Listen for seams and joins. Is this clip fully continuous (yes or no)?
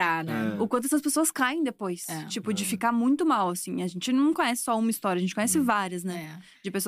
yes